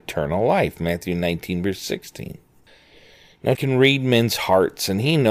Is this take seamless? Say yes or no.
no